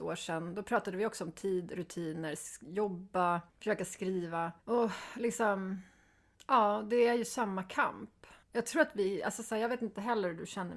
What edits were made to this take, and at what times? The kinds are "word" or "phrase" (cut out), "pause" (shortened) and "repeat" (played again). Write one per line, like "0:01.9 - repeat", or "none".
0:03.5 - pause
0:04.6 - pause
0:08.4 - pause

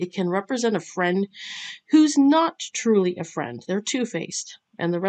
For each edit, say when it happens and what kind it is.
none

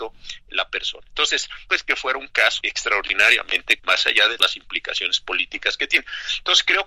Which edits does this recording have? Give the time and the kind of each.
0:01.7 - word
0:02.6 - word
0:03.8 - word
0:04.4 - word

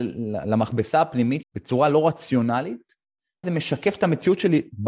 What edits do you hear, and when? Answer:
0:01.4 - word
0:03.4 - word

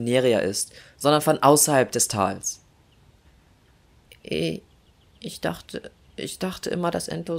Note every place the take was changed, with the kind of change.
none

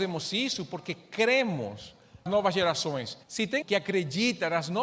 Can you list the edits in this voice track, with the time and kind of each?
0:02.3 - word
0:03.2 - pause
0:03.6 - word

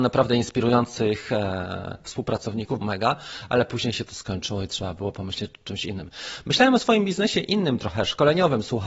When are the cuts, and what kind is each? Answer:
0:02.8 - word

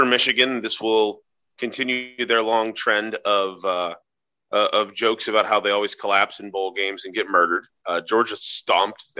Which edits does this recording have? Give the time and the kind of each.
none

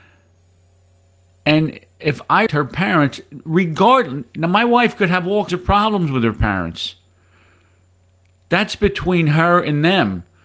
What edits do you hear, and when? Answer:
0:02.5 - word
0:05.5 - word

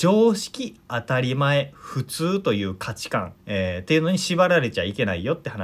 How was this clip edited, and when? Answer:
0:03.4 - pause

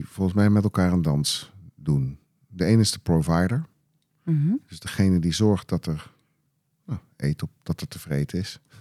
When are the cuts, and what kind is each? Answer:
none

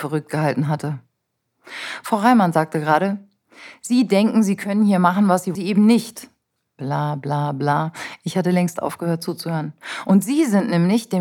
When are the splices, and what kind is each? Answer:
0:05.5 - phrase

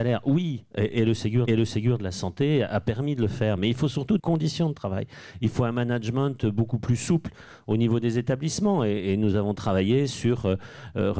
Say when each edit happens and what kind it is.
0:01.5 - repeat
0:04.2 - phrase

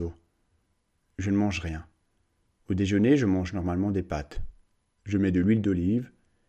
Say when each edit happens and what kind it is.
none

